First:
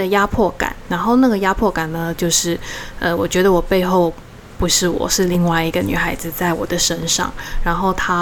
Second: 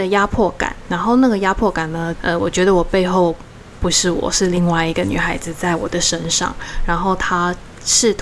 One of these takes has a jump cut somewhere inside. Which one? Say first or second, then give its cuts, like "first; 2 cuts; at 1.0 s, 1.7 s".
second; 1 cut; at 2.1 s